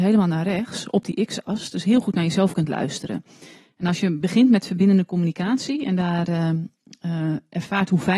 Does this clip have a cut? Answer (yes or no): no